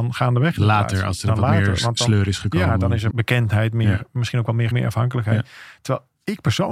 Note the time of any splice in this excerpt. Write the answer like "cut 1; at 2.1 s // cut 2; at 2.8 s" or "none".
cut 1; at 3.1 s // cut 2; at 4.7 s